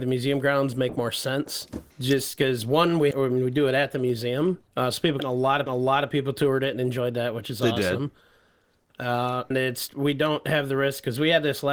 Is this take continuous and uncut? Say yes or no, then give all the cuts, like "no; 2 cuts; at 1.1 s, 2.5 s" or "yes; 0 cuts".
no; 7 cuts; at 1.9 s, 3.1 s, 4.7 s, 5.2 s, 5.7 s, 9.5 s, 9.9 s